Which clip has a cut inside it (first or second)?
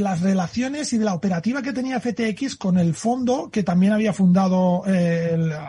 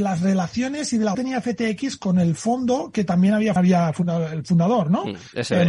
second